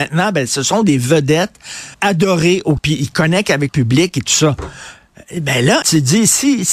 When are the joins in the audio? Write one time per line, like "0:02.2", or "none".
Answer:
0:01.9
0:02.8
0:03.7
0:05.8